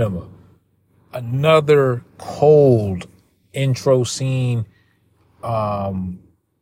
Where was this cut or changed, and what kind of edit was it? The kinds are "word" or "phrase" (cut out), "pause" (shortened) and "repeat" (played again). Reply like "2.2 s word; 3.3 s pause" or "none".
none